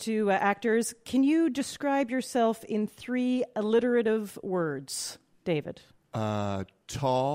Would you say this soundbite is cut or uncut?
uncut